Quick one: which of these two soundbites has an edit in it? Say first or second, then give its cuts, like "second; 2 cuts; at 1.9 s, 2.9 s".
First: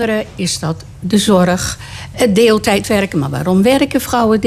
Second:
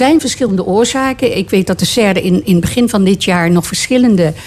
first; 1 cut; at 2.1 s